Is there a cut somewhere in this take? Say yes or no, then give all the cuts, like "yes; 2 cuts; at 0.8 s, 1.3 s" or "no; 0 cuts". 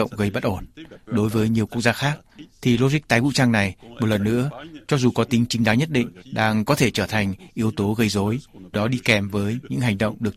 yes; 2 cuts; at 6.2 s, 8.7 s